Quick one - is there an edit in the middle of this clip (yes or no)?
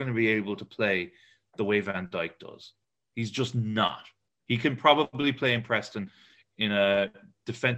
no